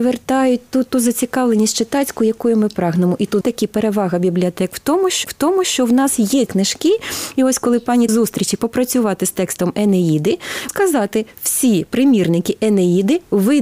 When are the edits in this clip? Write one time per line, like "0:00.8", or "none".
0:03.4
0:05.2
0:06.5
0:08.1
0:10.7